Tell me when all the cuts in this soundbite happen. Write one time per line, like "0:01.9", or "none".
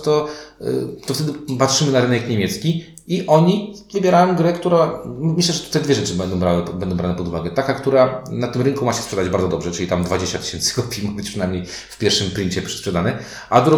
none